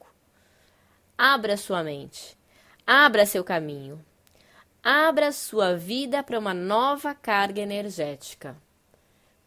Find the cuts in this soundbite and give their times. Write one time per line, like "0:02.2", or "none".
none